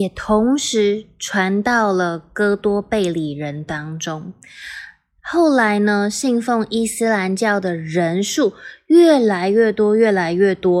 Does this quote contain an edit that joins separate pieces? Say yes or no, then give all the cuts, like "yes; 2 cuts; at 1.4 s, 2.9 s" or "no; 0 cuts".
no; 0 cuts